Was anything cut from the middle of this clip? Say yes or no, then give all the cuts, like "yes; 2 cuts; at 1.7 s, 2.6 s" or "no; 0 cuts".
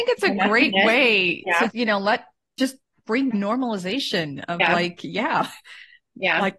yes; 2 cuts; at 1.7 s, 3.3 s